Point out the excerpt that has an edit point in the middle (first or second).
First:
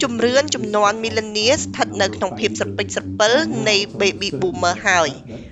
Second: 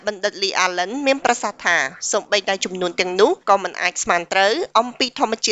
second